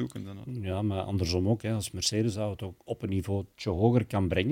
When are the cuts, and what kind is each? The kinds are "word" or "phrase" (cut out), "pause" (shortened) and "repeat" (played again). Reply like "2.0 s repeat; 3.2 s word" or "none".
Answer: 2.8 s pause; 3.5 s pause